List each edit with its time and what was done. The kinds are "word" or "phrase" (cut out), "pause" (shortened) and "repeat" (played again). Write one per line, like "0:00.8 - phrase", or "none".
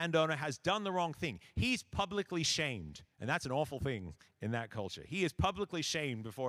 0:03.1 - pause